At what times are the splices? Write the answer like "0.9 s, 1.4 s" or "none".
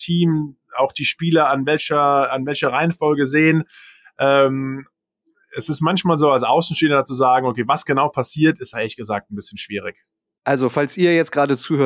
8.7 s